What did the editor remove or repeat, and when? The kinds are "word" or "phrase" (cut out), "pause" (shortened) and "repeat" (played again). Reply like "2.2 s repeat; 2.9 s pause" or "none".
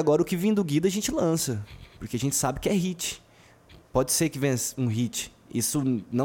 none